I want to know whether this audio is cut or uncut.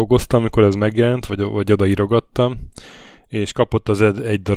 uncut